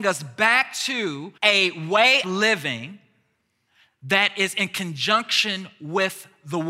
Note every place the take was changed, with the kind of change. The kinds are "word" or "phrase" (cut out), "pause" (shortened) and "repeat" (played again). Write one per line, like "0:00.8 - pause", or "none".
0:01.4 - pause
0:02.2 - word